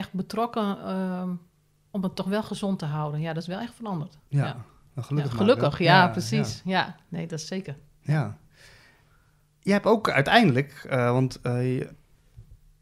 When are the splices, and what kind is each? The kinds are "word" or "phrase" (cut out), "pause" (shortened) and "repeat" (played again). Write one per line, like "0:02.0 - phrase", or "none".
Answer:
none